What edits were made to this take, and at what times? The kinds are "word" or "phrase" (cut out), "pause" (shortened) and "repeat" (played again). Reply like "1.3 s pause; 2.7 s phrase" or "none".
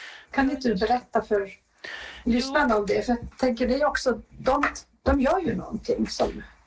3.3 s pause